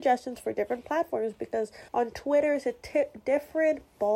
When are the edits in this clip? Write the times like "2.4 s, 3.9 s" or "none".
1.9 s